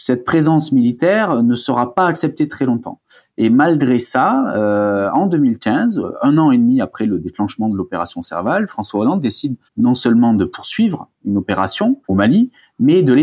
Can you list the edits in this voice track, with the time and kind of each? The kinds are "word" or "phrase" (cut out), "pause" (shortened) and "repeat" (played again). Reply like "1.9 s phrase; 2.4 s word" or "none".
9.6 s pause; 12.0 s pause